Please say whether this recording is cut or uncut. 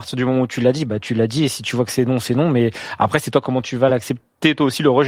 uncut